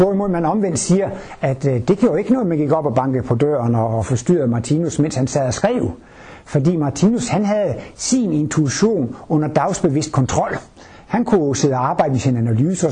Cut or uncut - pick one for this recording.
uncut